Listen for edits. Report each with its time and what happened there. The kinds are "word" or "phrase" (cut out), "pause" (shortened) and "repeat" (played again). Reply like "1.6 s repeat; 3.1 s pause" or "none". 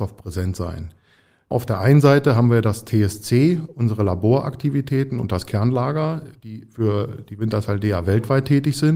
none